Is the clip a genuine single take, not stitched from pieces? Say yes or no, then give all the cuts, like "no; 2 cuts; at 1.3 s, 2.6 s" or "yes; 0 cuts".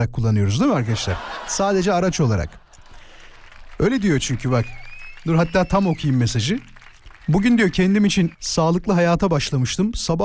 no; 2 cuts; at 7.2 s, 8.3 s